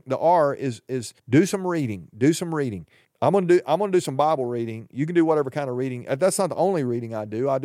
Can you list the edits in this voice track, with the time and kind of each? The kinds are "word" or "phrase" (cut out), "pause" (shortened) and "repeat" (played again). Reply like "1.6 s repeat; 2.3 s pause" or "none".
1.2 s pause; 3.0 s pause